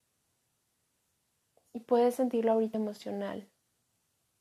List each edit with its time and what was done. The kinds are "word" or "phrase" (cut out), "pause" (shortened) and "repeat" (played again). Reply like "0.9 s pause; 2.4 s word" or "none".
2.7 s word